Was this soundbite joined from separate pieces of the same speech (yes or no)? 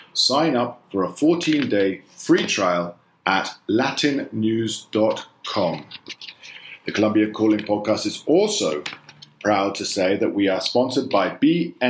no